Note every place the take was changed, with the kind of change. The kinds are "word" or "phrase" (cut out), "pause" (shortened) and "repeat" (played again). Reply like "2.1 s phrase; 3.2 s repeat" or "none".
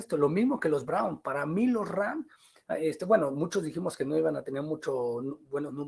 none